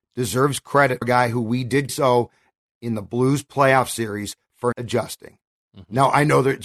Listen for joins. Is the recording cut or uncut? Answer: cut